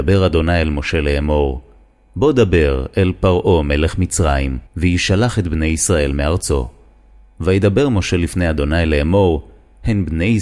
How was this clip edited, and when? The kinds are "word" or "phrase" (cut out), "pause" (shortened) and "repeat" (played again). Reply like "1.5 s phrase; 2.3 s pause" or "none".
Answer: 4.7 s pause